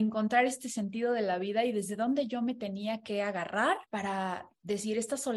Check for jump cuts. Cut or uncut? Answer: cut